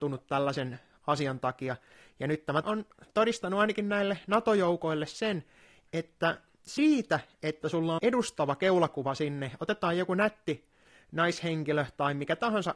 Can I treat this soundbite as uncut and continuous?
no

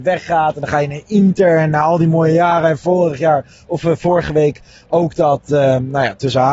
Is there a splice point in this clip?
no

